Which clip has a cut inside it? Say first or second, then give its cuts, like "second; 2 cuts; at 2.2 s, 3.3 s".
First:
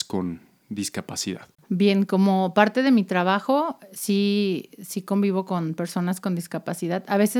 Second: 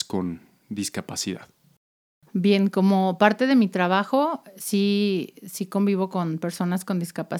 first; 1 cut; at 1.5 s